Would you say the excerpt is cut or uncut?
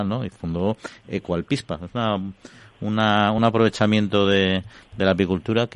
uncut